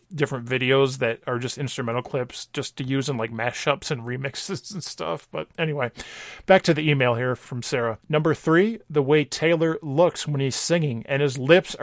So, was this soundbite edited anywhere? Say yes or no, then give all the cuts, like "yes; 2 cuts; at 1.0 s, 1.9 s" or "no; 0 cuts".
no; 0 cuts